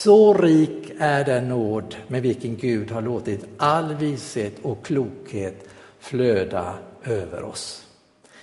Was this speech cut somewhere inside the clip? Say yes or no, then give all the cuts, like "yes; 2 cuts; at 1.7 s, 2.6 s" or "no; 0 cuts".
no; 0 cuts